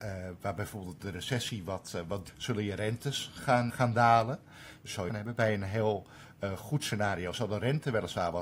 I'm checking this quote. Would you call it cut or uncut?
cut